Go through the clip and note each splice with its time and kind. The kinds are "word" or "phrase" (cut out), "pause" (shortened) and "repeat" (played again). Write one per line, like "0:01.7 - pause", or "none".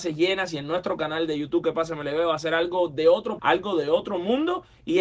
0:03.4 - word